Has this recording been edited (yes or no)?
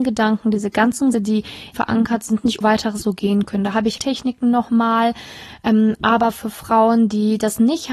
yes